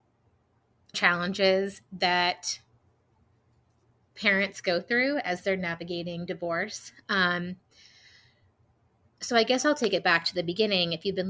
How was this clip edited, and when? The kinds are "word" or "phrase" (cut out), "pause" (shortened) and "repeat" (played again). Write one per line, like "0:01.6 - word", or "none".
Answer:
0:00.9 - word